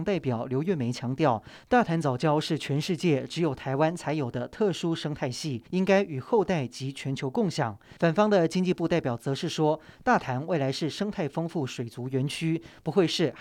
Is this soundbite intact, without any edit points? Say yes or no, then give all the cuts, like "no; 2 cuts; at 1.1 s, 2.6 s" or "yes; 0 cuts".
no; 2 cuts; at 5.7 s, 8.0 s